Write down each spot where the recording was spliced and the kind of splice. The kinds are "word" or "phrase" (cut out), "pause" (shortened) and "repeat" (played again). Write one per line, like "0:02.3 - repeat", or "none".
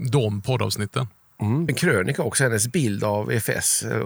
0:01.7 - phrase